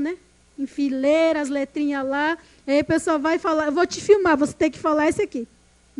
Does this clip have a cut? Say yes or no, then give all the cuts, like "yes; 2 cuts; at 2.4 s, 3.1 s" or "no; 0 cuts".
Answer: no; 0 cuts